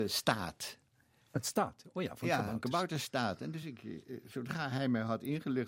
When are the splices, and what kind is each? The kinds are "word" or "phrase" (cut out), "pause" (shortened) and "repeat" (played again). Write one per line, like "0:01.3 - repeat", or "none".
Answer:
none